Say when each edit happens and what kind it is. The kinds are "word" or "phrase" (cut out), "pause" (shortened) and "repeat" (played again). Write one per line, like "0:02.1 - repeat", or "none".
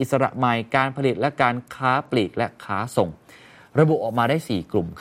none